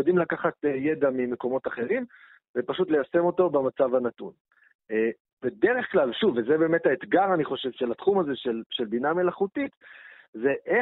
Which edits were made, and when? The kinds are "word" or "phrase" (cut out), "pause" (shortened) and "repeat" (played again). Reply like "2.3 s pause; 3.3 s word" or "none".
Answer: none